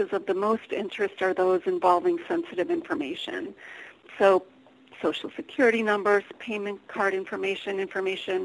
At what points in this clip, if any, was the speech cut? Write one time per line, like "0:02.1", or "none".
none